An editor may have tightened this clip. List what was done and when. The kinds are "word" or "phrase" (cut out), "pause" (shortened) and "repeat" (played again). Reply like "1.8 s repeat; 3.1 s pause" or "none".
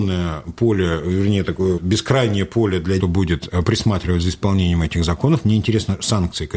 1.8 s word; 3.0 s phrase